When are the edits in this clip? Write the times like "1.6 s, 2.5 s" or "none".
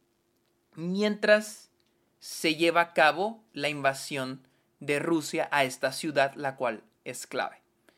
none